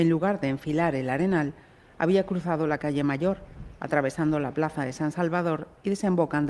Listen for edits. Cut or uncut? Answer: uncut